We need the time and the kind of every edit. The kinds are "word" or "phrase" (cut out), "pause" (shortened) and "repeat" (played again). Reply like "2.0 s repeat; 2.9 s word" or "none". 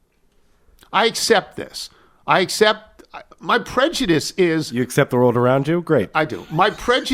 3.3 s pause